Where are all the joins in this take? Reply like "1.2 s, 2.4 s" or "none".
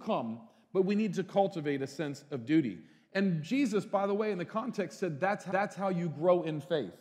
5.5 s